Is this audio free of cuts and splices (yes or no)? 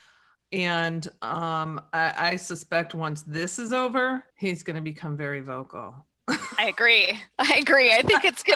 no